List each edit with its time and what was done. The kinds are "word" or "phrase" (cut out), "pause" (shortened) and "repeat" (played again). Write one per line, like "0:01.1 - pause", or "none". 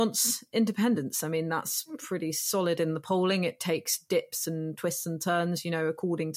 none